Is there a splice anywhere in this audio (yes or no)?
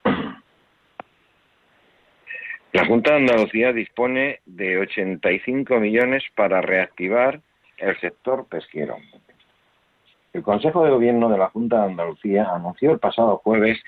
no